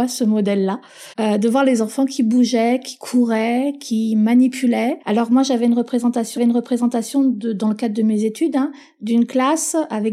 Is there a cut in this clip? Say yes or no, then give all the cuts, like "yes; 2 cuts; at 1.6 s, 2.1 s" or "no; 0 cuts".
yes; 3 cuts; at 1.1 s, 5.0 s, 6.4 s